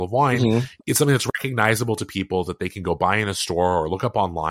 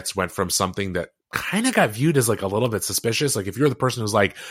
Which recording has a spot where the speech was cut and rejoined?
second; 1 cut; at 1.2 s

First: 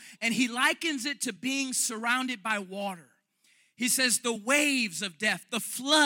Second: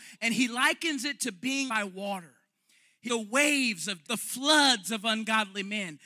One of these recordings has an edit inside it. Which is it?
second; 3 cuts; at 1.7 s, 3.1 s, 4.0 s

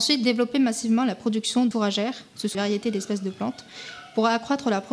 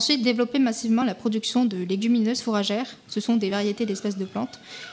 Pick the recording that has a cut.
first; 2 cuts; at 1.7 s, 2.5 s

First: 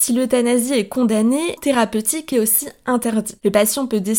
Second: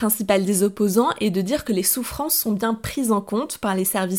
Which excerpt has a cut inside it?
first; 2 cuts; at 1.6 s, 2.3 s

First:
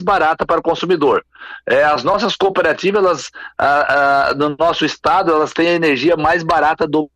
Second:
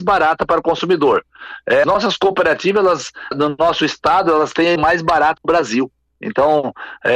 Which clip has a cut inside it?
second; 4 cuts; at 1.8 s, 3.3 s, 4.8 s, 5.4 s

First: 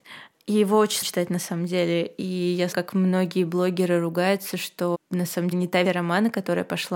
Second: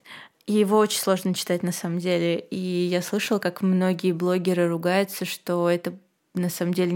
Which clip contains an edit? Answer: first; 5 cuts; at 1.0 s, 2.7 s, 4.9 s, 5.5 s, 5.8 s

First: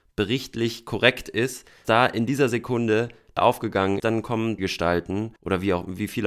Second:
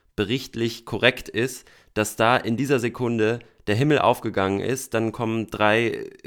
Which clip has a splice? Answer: first; 5 cuts; at 1.8 s, 3.4 s, 4.0 s, 4.6 s, 5.4 s

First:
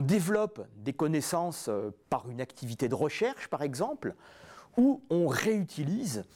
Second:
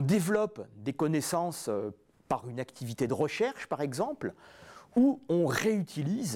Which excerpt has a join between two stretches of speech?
first; 1 cut; at 2.0 s

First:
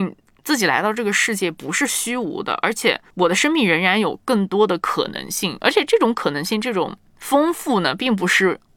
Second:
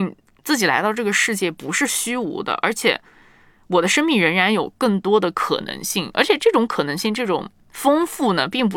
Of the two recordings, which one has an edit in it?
first; 1 cut; at 3.1 s

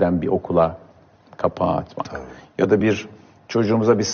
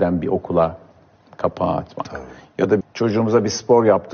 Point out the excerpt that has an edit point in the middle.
second; 1 cut; at 2.8 s

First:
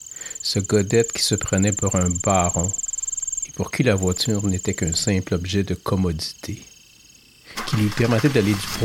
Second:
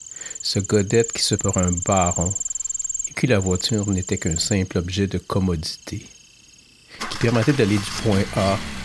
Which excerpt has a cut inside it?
second; 3 cuts; at 1.4 s, 3.1 s, 7.1 s

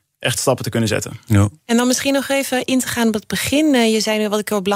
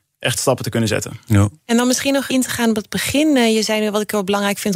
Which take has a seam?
second; 1 cut; at 2.3 s

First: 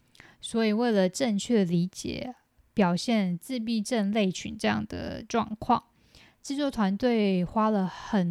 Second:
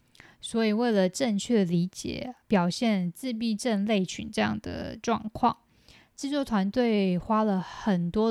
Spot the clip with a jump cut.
second; 1 cut; at 2.4 s

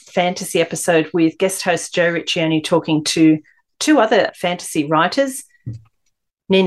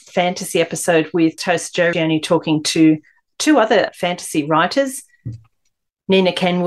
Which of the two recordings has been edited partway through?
second; 2 cuts; at 1.4 s, 1.9 s

